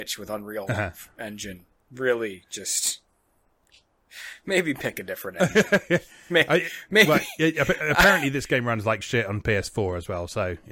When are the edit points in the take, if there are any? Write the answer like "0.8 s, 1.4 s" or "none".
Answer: none